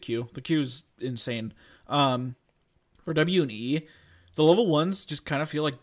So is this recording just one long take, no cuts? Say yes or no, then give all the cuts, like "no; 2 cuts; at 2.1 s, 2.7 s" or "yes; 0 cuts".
no; 1 cut; at 0.9 s